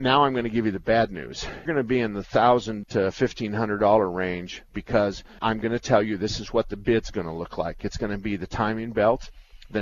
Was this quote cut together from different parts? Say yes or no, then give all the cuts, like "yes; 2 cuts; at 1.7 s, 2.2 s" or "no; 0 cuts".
yes; 3 cuts; at 1.7 s, 2.8 s, 5.4 s